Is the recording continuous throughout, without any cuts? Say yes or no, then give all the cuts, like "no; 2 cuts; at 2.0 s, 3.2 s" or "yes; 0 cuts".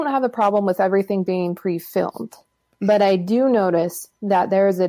yes; 0 cuts